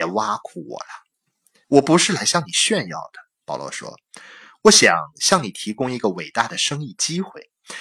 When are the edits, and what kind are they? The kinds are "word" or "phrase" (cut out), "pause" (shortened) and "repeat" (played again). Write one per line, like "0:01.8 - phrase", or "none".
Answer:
0:01.6 - pause